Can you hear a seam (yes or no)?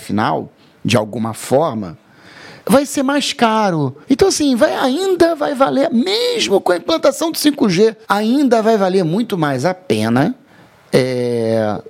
yes